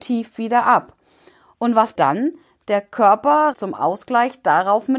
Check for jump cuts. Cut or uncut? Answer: cut